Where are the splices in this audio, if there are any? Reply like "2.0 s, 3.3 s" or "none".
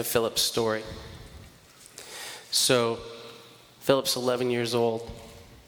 none